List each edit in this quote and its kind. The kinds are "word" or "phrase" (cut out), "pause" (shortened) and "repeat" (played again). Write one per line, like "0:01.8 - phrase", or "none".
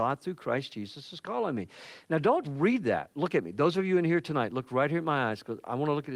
0:02.4 - word